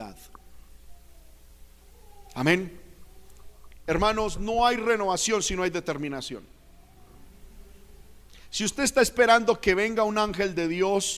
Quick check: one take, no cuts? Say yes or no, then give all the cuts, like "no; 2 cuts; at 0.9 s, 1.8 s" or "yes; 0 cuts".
yes; 0 cuts